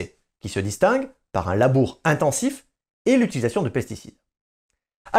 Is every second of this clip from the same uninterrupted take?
yes; 0 cuts

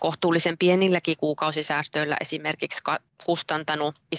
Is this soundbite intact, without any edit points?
yes; 0 cuts

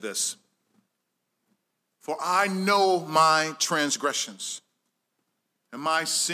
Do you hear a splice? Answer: no; 0 cuts

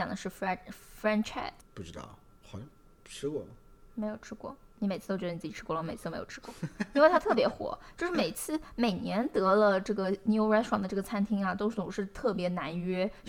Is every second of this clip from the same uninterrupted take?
yes; 0 cuts

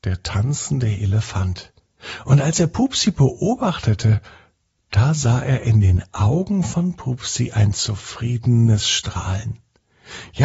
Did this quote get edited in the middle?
no; 0 cuts

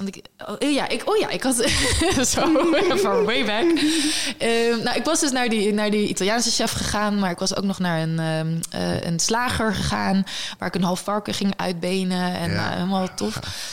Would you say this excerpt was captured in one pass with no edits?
yes; 0 cuts

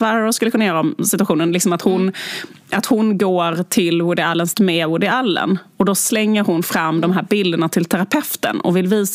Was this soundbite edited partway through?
yes; 1 cut; at 4.5 s

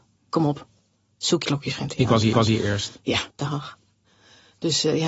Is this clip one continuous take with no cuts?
no; 3 cuts; at 1.4 s, 2.3 s, 3.3 s

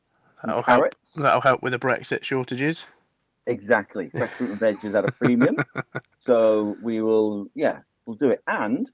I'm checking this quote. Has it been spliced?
no; 0 cuts

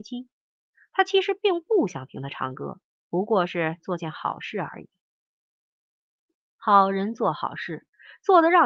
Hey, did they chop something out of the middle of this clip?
no; 0 cuts

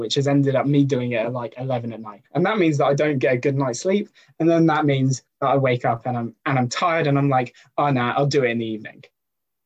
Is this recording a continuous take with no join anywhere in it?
no; 1 cut; at 2.2 s

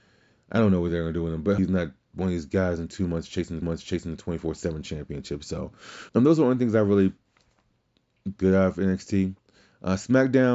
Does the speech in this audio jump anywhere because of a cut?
yes; 4 cuts; at 1.6 s, 3.6 s, 6.1 s, 8.4 s

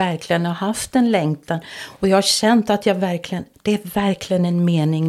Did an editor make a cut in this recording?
no; 0 cuts

